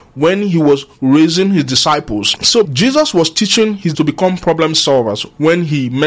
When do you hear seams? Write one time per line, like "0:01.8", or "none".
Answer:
0:02.6
0:03.9